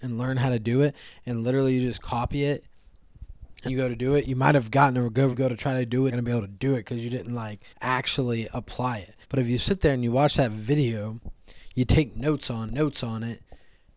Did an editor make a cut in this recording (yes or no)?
yes